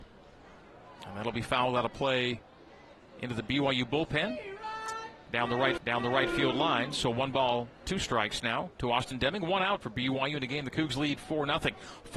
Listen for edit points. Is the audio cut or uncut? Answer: cut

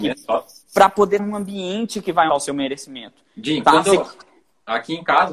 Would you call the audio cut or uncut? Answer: cut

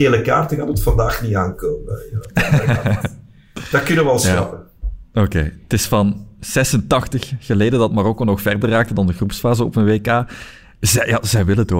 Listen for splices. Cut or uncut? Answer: uncut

